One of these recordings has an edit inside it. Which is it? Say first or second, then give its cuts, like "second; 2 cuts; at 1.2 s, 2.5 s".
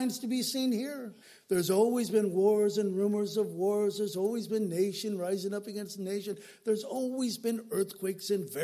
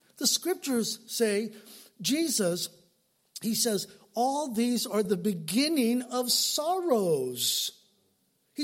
first; 1 cut; at 1.2 s